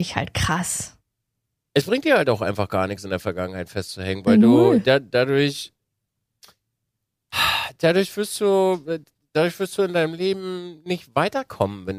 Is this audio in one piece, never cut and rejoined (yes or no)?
yes